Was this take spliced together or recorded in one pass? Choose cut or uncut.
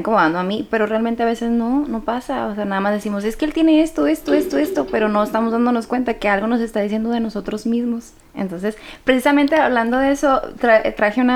uncut